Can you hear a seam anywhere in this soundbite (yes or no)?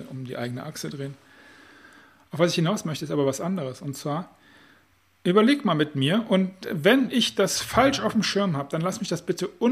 no